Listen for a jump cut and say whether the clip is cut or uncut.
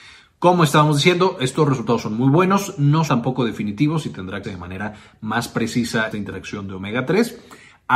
cut